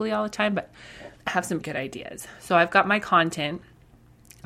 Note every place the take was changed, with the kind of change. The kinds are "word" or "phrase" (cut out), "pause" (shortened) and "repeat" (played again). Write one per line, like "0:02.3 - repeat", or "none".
0:01.2 - pause
0:01.6 - word